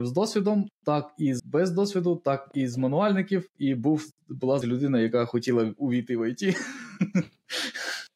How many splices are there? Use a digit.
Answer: 2